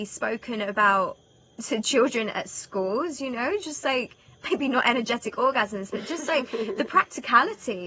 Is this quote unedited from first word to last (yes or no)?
yes